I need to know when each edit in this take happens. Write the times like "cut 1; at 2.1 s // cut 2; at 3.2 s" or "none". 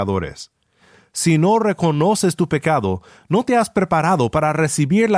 none